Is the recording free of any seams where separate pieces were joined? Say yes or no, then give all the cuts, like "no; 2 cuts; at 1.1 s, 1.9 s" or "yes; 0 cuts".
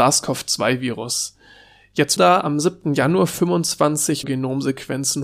no; 2 cuts; at 2.2 s, 4.2 s